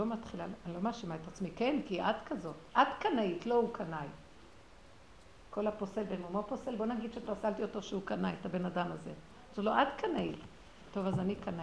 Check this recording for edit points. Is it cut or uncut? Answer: uncut